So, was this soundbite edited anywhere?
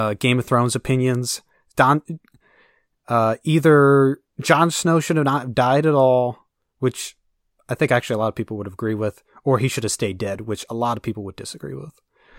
no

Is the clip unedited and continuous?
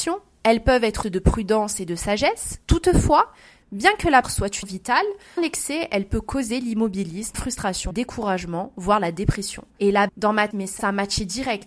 no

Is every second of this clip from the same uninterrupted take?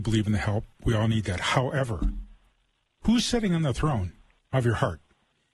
yes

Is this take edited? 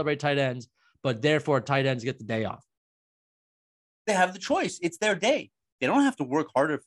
no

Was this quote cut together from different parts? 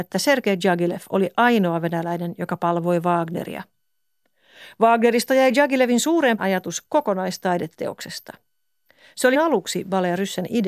yes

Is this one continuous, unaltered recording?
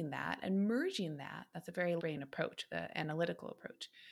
no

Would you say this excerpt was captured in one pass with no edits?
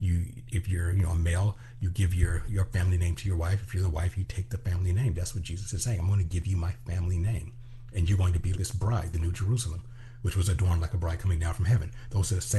no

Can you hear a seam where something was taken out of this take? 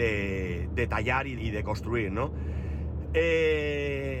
yes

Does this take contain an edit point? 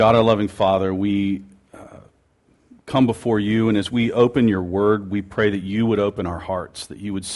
no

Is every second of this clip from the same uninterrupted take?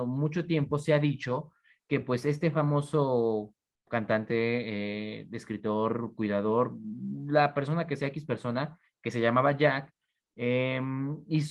yes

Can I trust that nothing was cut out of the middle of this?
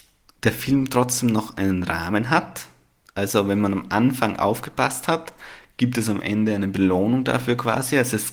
yes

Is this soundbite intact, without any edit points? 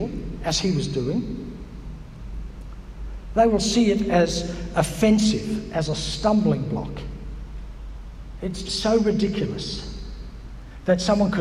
no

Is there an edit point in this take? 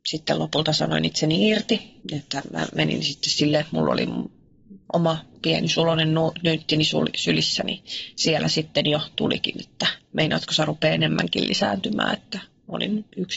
yes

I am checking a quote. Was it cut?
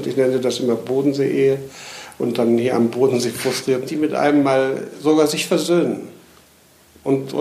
yes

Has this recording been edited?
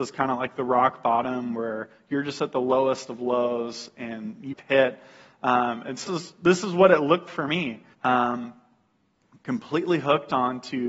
yes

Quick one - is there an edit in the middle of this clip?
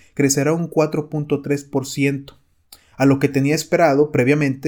no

